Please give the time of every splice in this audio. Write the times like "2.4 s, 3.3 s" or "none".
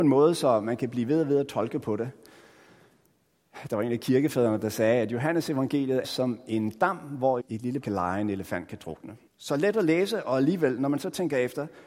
6.0 s, 7.4 s, 7.8 s, 9.3 s